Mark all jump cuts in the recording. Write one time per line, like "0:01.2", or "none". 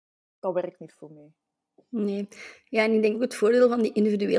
0:03.1